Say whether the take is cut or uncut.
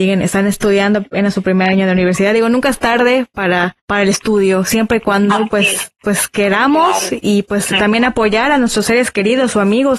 cut